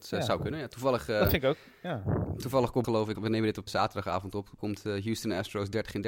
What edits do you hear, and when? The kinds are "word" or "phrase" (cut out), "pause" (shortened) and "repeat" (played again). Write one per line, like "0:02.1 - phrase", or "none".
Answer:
0:02.8 - word
0:03.2 - word
0:03.7 - word
0:04.6 - word